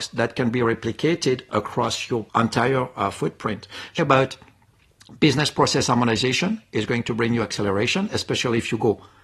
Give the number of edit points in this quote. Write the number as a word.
two